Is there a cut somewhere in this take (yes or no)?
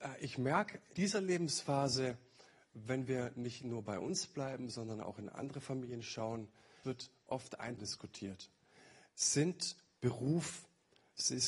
yes